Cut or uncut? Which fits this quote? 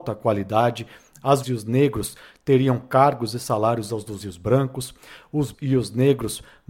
cut